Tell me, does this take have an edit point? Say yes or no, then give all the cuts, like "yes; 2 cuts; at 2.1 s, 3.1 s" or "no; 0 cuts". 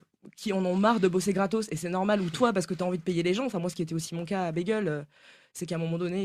no; 0 cuts